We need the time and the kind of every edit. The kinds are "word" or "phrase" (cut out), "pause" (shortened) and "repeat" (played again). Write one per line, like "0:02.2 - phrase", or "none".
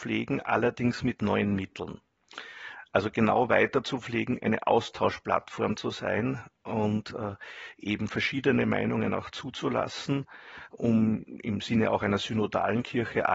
none